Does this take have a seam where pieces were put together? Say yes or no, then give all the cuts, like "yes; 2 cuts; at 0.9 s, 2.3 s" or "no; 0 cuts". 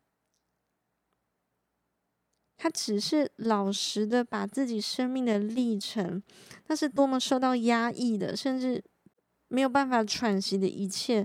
no; 0 cuts